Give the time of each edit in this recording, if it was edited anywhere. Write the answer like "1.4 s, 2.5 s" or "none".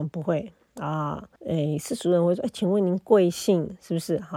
1.4 s